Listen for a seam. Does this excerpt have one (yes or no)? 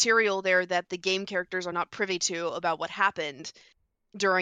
no